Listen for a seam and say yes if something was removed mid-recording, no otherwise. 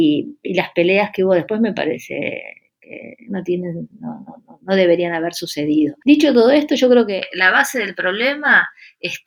no